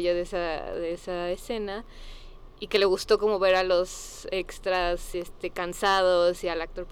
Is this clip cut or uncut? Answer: uncut